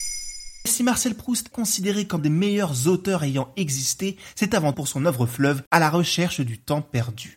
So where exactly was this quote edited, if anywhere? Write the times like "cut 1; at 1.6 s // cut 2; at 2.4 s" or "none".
cut 1; at 1.5 s // cut 2; at 2.2 s // cut 3; at 4.7 s // cut 4; at 5.7 s